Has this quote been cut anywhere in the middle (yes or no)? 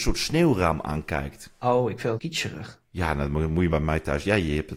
yes